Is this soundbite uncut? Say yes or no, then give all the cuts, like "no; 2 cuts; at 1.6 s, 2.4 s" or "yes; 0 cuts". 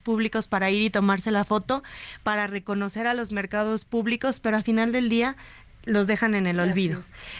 yes; 0 cuts